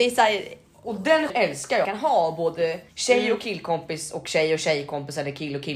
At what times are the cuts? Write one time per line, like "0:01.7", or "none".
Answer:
0:01.3
0:01.8
0:02.9